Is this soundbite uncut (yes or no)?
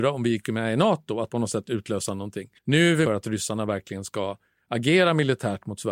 no